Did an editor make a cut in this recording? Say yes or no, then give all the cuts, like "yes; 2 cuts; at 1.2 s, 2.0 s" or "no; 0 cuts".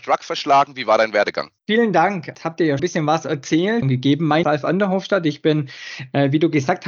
yes; 4 cuts; at 1.6 s, 2.8 s, 3.8 s, 4.4 s